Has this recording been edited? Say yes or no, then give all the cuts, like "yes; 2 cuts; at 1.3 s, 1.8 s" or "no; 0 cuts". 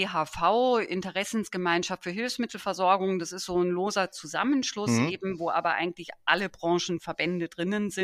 no; 0 cuts